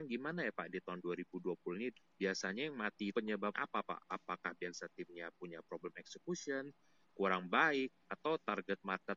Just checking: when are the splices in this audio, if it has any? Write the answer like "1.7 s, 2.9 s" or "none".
1.9 s, 3.1 s, 3.5 s, 7.1 s